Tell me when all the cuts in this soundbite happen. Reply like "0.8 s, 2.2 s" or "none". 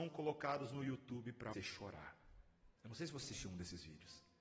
1.5 s, 2.8 s, 3.2 s